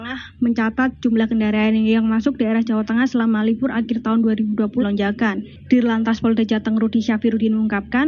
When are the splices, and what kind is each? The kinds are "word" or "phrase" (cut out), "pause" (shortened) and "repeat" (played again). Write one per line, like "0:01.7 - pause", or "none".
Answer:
0:04.8 - word